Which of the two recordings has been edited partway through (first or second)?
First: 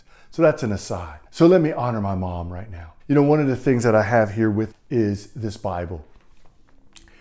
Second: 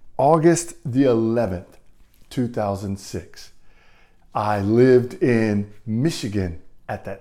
first